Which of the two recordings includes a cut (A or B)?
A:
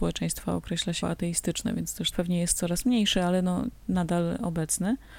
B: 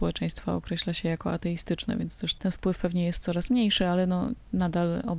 A